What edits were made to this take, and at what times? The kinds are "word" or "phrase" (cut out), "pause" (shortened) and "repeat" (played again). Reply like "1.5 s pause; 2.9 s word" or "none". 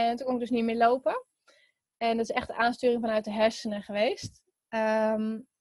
none